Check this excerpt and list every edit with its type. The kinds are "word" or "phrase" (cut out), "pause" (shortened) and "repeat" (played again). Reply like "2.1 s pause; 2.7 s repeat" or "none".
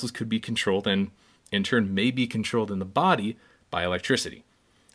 none